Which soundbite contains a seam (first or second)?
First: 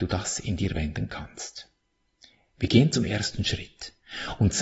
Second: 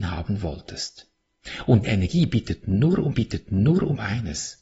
second